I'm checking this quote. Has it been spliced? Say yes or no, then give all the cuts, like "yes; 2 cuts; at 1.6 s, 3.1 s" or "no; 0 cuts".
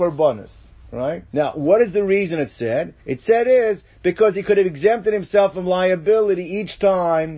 yes; 2 cuts; at 1.3 s, 3.0 s